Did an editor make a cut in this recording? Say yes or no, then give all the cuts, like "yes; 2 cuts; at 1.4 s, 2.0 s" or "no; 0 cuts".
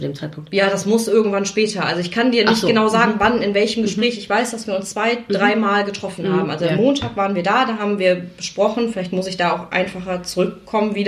no; 0 cuts